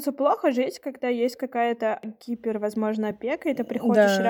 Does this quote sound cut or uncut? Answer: uncut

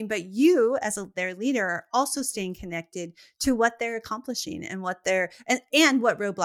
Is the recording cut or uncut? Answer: uncut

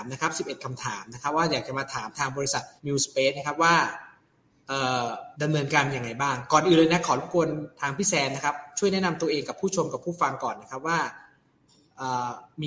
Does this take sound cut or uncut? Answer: cut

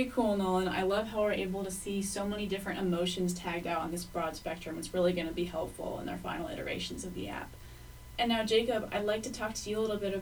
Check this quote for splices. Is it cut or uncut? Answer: uncut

